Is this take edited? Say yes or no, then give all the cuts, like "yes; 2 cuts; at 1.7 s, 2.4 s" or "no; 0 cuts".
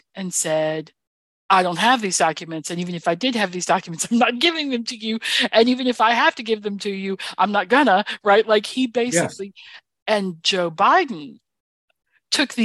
no; 0 cuts